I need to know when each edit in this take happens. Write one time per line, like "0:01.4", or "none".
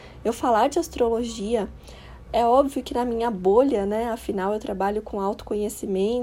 none